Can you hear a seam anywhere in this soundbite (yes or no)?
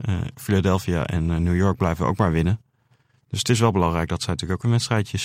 no